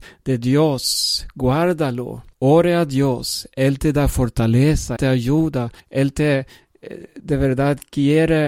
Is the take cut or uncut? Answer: cut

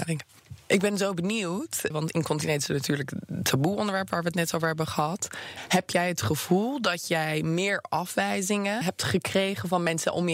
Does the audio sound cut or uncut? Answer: cut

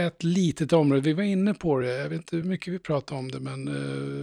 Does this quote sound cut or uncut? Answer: uncut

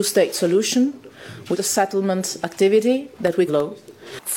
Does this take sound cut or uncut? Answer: cut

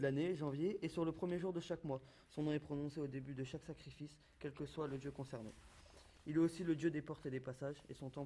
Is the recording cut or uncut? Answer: uncut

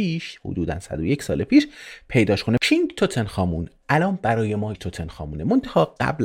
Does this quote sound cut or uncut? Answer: cut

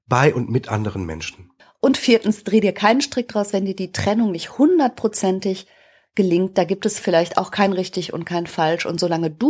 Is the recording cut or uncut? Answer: uncut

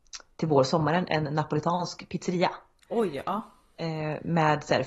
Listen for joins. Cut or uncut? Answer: uncut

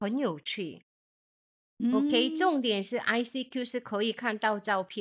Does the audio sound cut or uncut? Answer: uncut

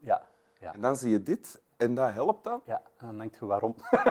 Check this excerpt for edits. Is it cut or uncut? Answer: uncut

